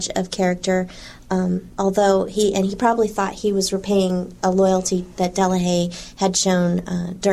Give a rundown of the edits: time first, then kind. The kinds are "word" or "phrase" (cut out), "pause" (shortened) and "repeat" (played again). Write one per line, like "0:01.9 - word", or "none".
0:01.7 - pause

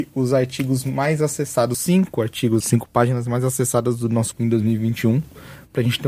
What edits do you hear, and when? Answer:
0:01.7 - word
0:02.6 - phrase
0:04.3 - word

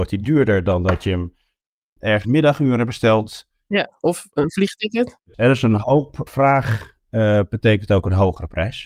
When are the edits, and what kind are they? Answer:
0:02.2 - phrase
0:06.3 - word

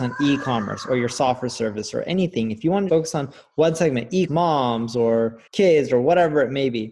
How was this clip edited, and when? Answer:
0:02.9 - word
0:04.3 - word
0:05.5 - pause

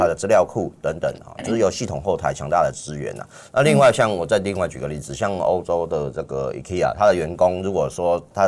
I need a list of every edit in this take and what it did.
none

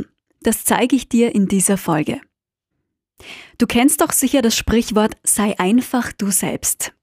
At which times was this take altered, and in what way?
none

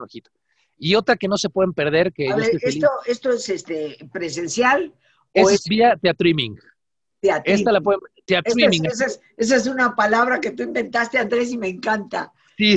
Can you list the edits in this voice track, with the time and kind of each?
0:07.1 - word

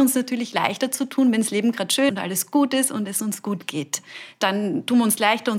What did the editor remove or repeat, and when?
0:02.1 - word

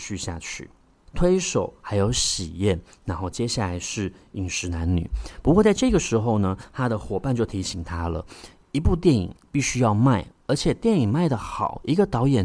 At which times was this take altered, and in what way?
0:09.4 - pause

